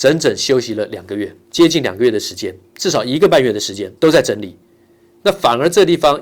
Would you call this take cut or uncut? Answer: cut